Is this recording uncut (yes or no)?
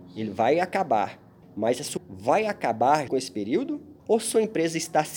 no